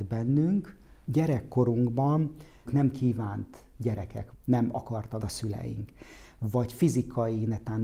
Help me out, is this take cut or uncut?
cut